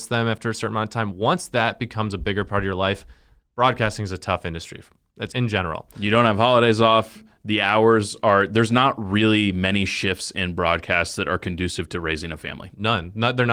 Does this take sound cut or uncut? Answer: cut